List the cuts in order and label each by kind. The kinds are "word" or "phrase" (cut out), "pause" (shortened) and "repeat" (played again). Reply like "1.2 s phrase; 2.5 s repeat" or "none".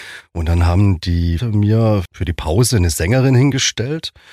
1.4 s word; 2.1 s word